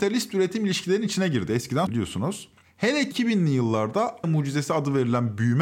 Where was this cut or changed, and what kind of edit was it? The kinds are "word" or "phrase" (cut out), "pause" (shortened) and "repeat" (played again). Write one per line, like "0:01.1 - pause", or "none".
0:01.9 - word
0:03.1 - word
0:04.2 - word